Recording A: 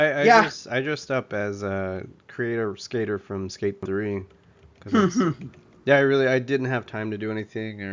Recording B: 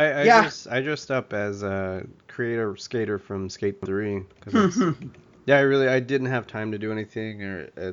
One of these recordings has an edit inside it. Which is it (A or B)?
B